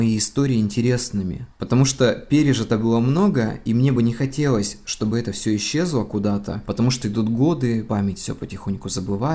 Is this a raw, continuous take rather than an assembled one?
yes; 0 cuts

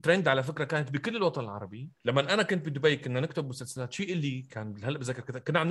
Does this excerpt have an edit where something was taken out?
yes; 1 cut; at 2.0 s

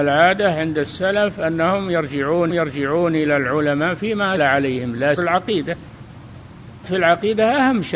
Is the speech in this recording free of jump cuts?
no; 4 cuts; at 2.5 s, 4.4 s, 5.2 s, 6.8 s

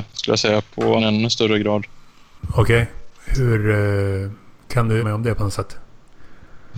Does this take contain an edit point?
yes; 2 cuts; at 1.0 s, 5.0 s

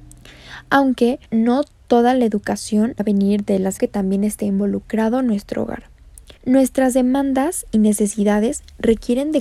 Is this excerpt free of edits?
no; 4 cuts; at 1.3 s, 3.0 s, 3.8 s, 6.4 s

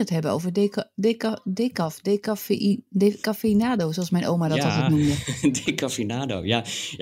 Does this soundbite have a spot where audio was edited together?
no; 0 cuts

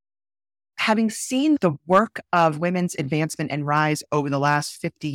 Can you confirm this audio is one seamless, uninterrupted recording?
yes; 0 cuts

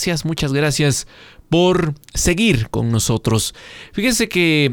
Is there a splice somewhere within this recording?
no; 0 cuts

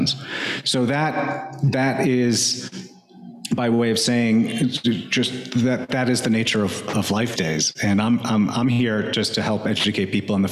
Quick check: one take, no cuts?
no; 1 cut; at 7.4 s

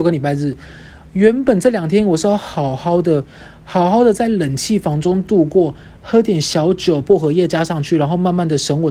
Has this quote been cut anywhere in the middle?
yes; 1 cut; at 7.0 s

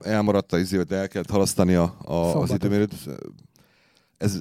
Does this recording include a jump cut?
no; 0 cuts

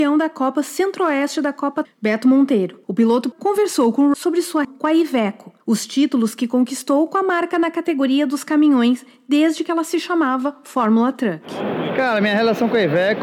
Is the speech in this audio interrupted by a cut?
yes; 6 cuts; at 1.8 s, 2.8 s, 3.3 s, 4.1 s, 4.6 s, 5.6 s

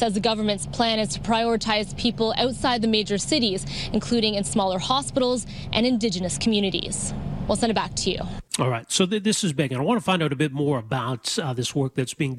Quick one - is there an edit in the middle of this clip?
yes; 1 cut; at 8.5 s

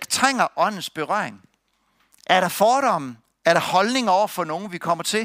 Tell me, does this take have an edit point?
no; 0 cuts

